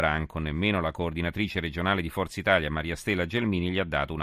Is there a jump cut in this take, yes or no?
no